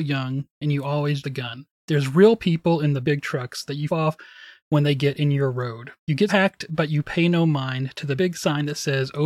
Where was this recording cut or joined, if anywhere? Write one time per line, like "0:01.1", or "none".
0:01.2
0:01.7
0:03.0
0:03.9
0:06.0
0:06.3
0:08.2